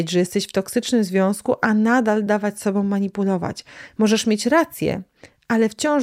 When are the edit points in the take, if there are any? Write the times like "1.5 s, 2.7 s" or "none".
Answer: none